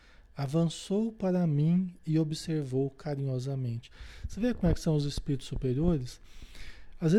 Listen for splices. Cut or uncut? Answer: uncut